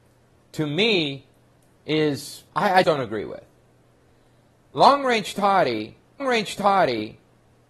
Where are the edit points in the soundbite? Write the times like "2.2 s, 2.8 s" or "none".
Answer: 2.5 s, 2.8 s, 6.2 s